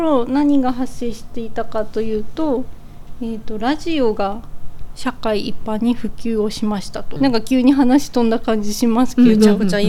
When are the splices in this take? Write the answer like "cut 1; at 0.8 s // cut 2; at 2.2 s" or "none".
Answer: cut 1; at 7.2 s